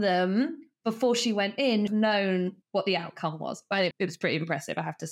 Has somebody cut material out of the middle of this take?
yes; 3 cuts; at 1.9 s, 2.6 s, 3.9 s

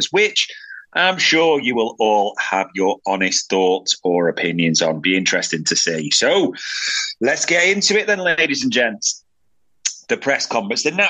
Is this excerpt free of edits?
yes; 0 cuts

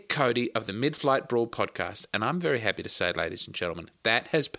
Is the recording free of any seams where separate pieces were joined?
yes; 0 cuts

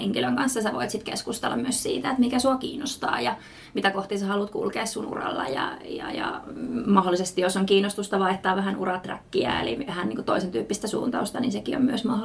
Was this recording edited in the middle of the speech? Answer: no; 0 cuts

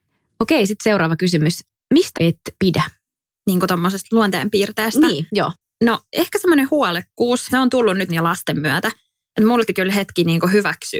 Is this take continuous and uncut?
no; 5 cuts; at 2.1 s, 2.6 s, 7.5 s, 8.1 s, 9.7 s

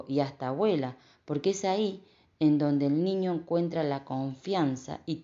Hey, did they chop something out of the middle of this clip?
no; 0 cuts

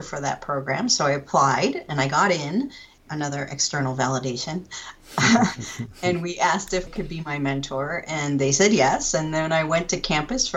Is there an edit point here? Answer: yes; 1 cut; at 6.9 s

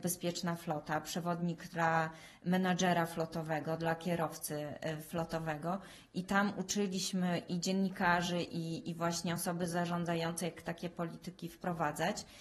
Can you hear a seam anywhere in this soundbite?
no; 0 cuts

